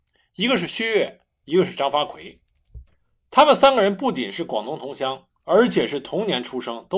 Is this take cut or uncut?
uncut